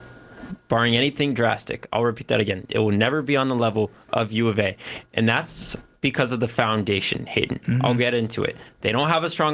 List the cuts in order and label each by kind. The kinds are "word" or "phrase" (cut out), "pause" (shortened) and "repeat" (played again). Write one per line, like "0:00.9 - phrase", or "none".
none